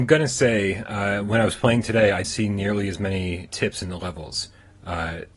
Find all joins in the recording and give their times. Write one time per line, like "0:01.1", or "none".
0:02.2
0:03.5
0:04.0